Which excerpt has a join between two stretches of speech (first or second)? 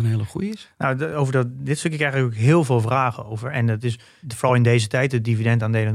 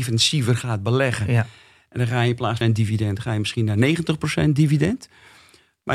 second